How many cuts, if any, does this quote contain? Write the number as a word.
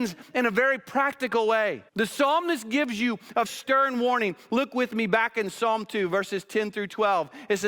two